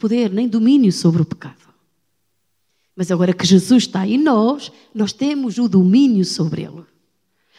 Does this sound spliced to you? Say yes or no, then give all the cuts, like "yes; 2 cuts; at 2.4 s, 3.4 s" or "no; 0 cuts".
no; 0 cuts